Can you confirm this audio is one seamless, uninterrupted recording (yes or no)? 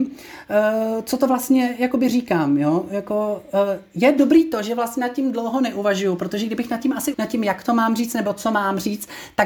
no